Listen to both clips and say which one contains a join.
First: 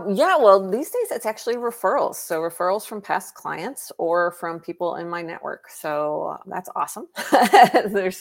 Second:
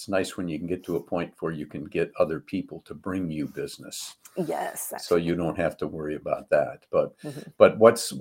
first; 1 cut; at 6.4 s

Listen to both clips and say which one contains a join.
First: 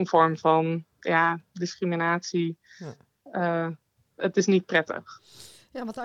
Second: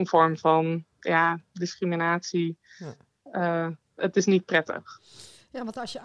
second; 1 cut; at 3.8 s

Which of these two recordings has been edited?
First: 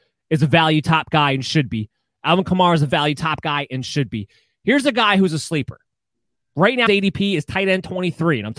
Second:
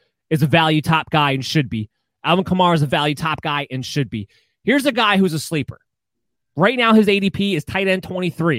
first; 1 cut; at 6.9 s

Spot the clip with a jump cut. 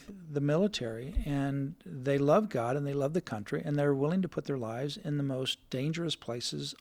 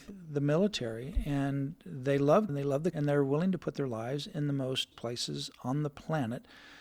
second; 3 cuts; at 2.5 s, 2.9 s, 4.9 s

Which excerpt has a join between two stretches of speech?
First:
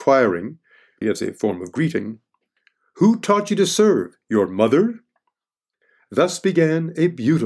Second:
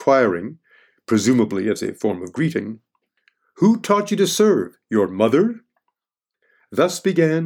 first; 1 cut; at 1.0 s

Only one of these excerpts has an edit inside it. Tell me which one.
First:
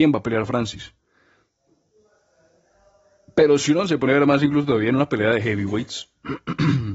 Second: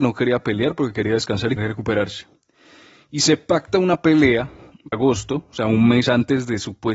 second; 2 cuts; at 1.6 s, 4.9 s

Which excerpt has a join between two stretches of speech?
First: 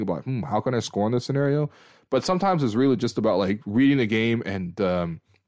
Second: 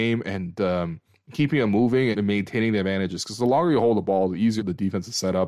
second; 2 cuts; at 2.1 s, 4.6 s

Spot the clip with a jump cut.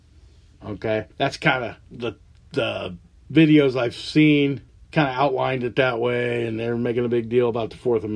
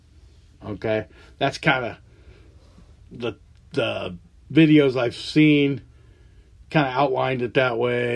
first; 3 cuts; at 1.1 s, 1.8 s, 4.7 s

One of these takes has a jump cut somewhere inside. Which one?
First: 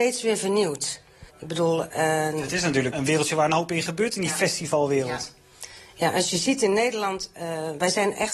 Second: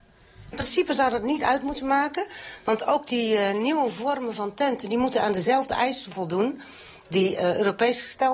first; 2 cuts; at 1.3 s, 2.9 s

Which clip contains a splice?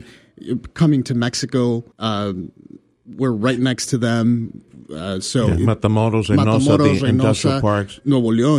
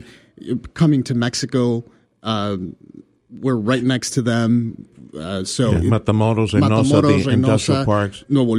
first; 1 cut; at 1.9 s

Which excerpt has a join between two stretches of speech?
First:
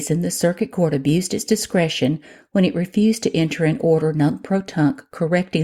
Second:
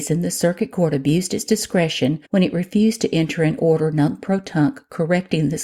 second; 1 cut; at 2.2 s

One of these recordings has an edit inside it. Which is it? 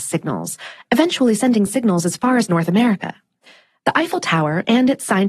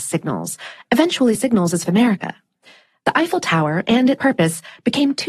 second; 3 cuts; at 1.3 s, 1.8 s, 4.2 s

